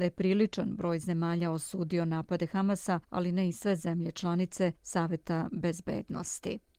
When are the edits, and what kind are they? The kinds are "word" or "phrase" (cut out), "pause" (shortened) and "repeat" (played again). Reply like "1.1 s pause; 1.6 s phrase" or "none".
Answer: 3.0 s pause; 4.8 s pause